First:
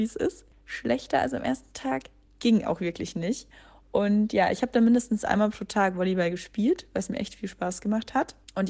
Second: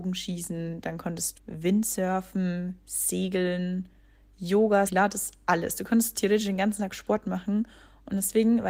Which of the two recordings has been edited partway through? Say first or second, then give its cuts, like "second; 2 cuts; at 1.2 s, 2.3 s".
second; 2 cuts; at 1.3 s, 4.9 s